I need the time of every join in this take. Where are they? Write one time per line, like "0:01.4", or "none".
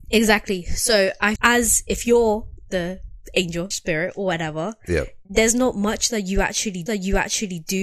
0:01.4
0:03.7
0:05.2
0:06.9